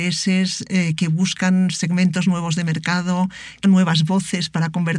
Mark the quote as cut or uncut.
cut